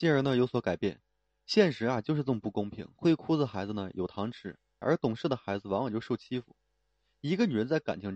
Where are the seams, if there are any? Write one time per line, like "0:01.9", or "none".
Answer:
0:04.8

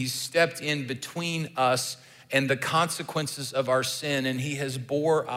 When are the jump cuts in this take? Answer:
none

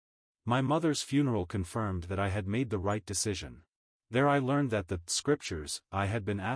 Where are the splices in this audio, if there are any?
0:03.8

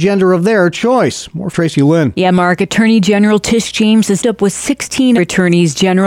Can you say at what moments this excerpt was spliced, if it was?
0:01.5
0:04.2
0:05.2

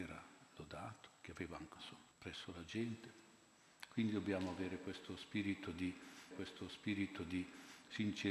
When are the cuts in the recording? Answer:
0:01.8
0:02.1
0:06.3

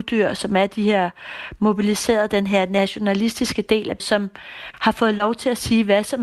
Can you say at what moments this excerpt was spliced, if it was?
0:04.0

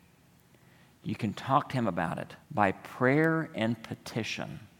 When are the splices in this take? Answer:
0:02.4

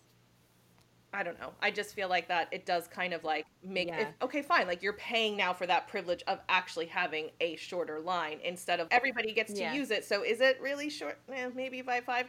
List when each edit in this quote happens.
0:08.9

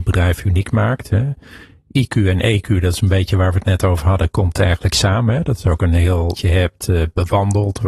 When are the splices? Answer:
0:06.3

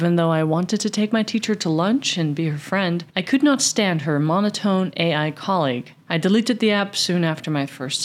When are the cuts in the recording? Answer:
0:03.1
0:06.0

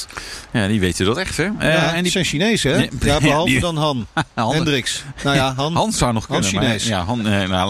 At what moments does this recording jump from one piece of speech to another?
none

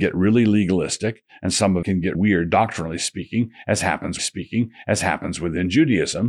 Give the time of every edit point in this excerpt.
0:01.8
0:02.1
0:04.2

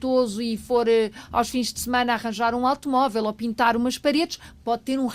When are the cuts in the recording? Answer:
none

